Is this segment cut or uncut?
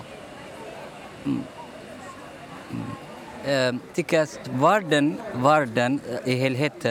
cut